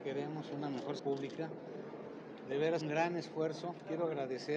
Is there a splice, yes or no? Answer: yes